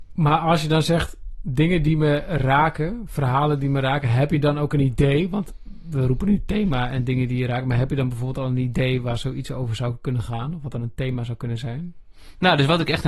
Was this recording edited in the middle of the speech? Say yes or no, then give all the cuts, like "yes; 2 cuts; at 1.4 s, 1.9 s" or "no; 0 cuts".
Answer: no; 0 cuts